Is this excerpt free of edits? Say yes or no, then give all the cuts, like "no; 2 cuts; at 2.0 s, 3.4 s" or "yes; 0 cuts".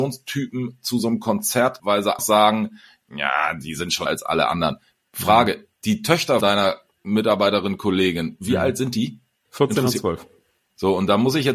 no; 4 cuts; at 1.8 s, 2.2 s, 4.1 s, 6.4 s